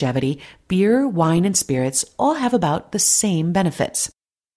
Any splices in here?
no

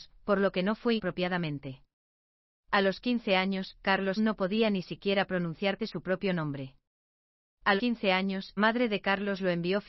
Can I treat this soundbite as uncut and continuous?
no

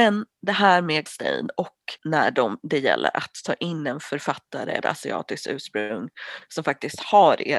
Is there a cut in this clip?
yes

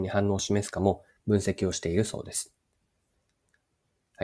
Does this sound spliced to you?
no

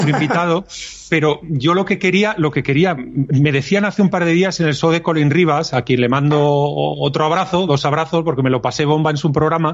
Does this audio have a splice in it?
no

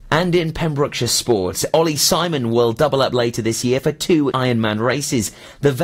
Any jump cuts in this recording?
yes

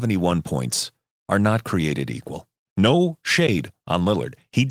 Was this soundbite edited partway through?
no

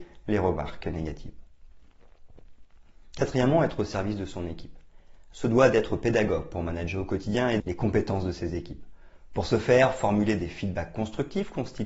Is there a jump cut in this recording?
yes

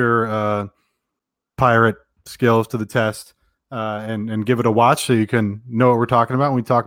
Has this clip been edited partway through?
no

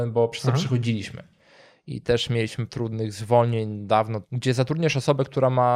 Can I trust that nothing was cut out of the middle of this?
no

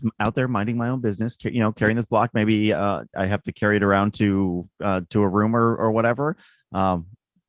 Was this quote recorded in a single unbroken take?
no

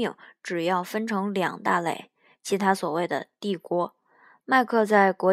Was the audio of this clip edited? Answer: no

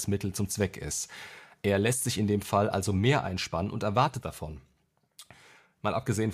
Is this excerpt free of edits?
no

